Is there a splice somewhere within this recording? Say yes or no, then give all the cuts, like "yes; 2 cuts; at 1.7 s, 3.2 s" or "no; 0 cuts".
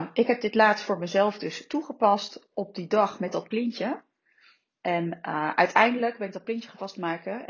no; 0 cuts